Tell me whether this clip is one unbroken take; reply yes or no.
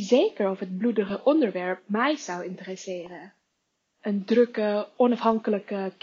yes